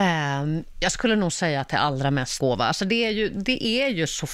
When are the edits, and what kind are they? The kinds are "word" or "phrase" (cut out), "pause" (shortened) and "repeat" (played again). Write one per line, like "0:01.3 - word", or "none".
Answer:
0:02.4 - phrase